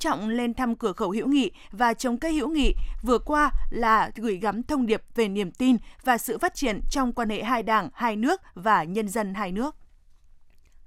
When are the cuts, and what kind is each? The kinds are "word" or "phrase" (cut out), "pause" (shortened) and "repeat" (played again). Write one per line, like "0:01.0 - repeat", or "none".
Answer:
none